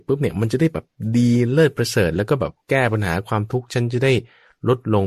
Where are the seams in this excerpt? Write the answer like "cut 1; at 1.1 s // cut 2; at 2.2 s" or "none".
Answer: cut 1; at 2.6 s